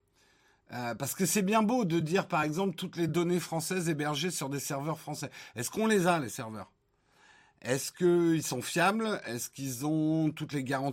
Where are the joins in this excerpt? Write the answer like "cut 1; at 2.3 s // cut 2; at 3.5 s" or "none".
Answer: none